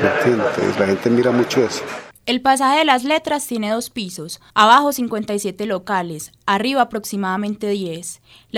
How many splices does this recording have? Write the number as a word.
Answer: two